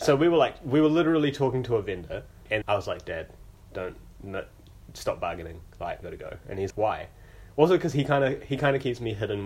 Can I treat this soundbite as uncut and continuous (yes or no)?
no